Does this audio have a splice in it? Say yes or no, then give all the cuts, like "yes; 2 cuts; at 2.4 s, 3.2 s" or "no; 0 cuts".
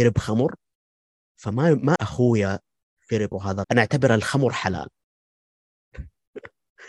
yes; 3 cuts; at 2.0 s, 3.3 s, 3.6 s